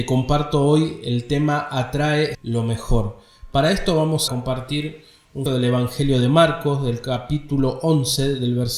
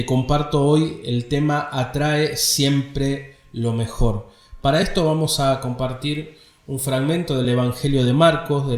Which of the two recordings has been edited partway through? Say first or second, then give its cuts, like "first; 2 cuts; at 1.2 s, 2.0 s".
first; 3 cuts; at 2.3 s, 4.3 s, 5.5 s